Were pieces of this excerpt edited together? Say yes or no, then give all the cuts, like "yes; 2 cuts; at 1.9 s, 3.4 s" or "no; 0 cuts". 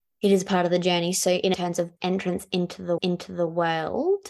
yes; 3 cuts; at 1.5 s, 2.0 s, 3.0 s